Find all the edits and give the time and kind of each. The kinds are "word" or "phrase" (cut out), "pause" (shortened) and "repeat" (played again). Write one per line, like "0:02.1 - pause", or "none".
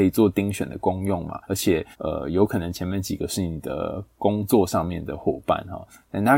0:01.4 - pause
0:01.9 - pause